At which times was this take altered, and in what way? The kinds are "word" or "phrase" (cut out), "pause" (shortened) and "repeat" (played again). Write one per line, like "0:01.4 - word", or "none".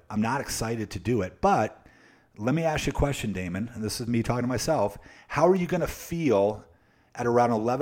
none